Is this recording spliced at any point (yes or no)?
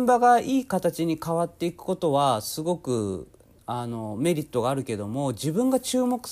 no